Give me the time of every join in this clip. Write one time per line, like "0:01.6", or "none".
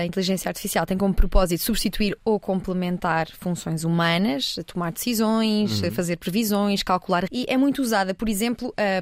0:07.3